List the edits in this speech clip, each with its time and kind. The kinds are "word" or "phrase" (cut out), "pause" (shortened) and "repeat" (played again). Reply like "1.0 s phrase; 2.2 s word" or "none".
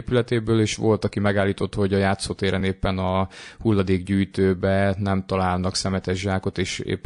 none